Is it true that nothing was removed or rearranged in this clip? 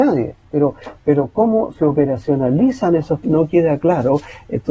no; 1 cut; at 3.2 s

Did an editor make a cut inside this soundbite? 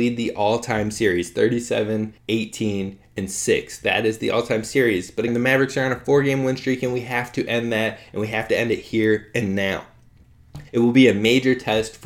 yes; 3 cuts; at 2.2 s, 5.3 s, 10.7 s

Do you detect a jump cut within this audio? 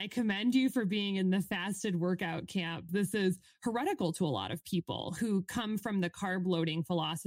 yes; 1 cut; at 2.9 s

